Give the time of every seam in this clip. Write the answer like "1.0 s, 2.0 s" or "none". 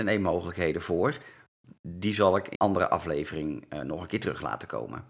2.5 s